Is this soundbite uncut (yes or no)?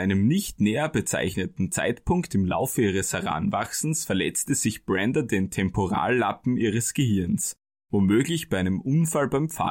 yes